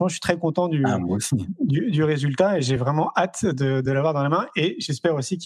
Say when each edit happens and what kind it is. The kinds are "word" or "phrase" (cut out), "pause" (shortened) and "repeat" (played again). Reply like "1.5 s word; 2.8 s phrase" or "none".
none